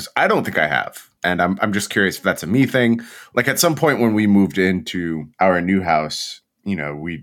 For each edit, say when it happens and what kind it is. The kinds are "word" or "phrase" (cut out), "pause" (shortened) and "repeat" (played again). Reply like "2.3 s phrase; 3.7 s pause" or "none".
1.2 s pause; 5.3 s pause